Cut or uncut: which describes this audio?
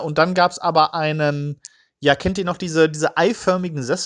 uncut